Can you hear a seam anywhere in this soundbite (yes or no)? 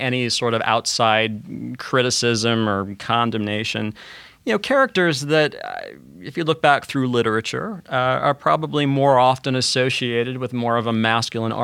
no